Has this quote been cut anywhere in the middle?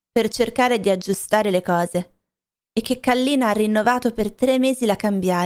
no; 0 cuts

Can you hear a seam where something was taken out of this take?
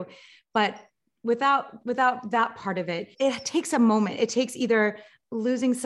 yes; 1 cut; at 3.1 s

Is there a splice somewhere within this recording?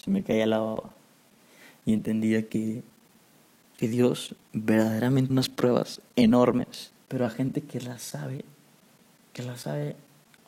yes; 3 cuts; at 3.7 s, 5.3 s, 7.0 s

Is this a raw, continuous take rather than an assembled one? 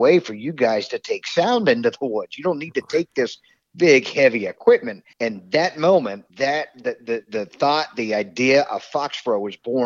no; 2 cuts; at 5.1 s, 6.3 s

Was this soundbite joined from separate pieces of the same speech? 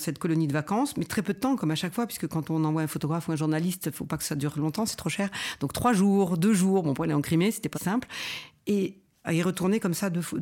yes; 1 cut; at 7.7 s

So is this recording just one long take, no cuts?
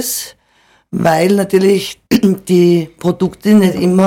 no; 1 cut; at 2.1 s

